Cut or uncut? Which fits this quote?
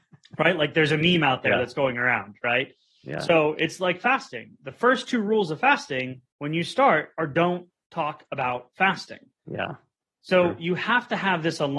cut